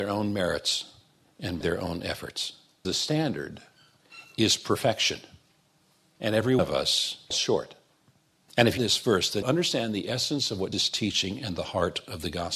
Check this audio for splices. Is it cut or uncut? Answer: cut